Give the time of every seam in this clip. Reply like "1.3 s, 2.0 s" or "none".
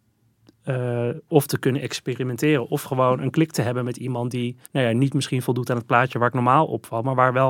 4.6 s